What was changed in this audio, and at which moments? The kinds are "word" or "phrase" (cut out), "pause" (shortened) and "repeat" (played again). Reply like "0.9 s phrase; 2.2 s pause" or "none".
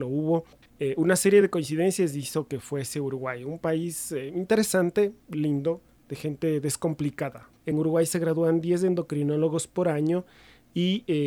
none